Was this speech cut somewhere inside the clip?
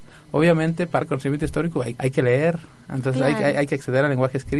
yes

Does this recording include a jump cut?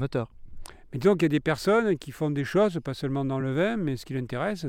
no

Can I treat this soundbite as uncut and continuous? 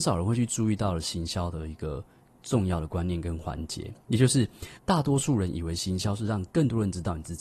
no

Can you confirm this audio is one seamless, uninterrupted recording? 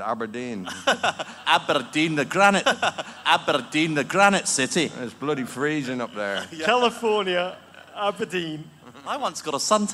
no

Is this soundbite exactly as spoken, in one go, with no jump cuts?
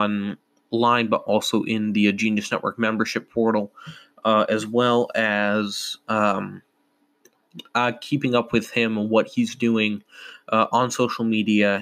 yes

